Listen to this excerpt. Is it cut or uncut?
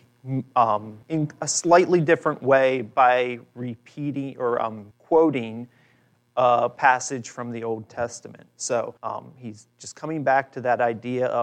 cut